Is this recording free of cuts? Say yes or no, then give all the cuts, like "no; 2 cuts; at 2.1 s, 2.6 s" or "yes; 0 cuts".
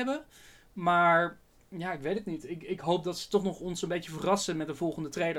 yes; 0 cuts